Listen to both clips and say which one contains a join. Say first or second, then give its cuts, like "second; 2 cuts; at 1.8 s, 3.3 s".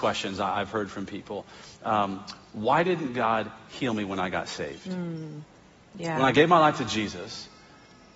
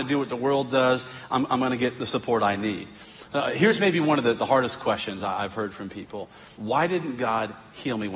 second; 1 cut; at 6.5 s